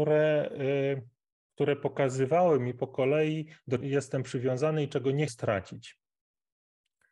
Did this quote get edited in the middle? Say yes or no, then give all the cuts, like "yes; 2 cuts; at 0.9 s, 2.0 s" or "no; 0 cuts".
yes; 2 cuts; at 3.8 s, 5.3 s